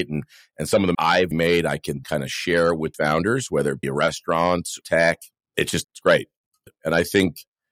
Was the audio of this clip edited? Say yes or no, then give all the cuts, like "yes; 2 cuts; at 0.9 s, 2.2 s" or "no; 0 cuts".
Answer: yes; 8 cuts; at 0.9 s, 1.3 s, 2.0 s, 2.9 s, 3.8 s, 4.8 s, 5.8 s, 6.7 s